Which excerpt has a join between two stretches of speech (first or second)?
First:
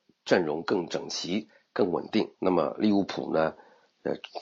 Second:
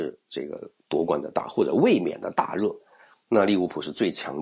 first